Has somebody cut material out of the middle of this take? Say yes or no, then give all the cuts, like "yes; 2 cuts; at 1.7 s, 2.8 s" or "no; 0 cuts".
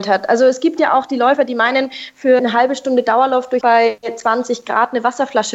yes; 2 cuts; at 2.4 s, 3.6 s